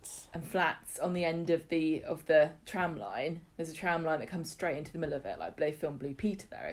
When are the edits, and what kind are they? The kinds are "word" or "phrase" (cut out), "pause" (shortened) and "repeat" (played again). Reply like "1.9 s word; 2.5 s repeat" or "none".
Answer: 3.5 s pause